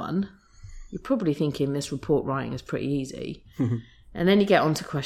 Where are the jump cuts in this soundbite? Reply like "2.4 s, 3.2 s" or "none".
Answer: none